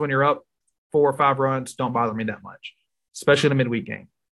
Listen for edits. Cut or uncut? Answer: uncut